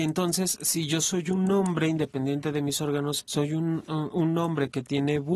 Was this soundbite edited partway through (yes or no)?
yes